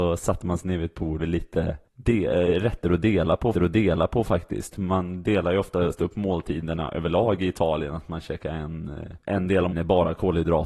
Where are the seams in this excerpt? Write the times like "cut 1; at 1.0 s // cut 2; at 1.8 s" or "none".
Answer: cut 1; at 1.2 s // cut 2; at 1.9 s // cut 3; at 3.5 s // cut 4; at 9.2 s // cut 5; at 9.7 s